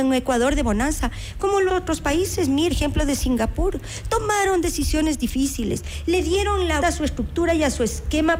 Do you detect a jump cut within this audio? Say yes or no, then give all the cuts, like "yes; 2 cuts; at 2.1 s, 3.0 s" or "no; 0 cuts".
yes; 3 cuts; at 1.7 s, 2.7 s, 6.8 s